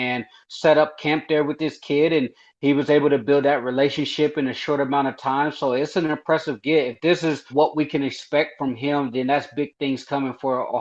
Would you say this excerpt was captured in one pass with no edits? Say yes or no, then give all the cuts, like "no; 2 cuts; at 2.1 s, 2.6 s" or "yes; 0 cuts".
no; 1 cut; at 7.5 s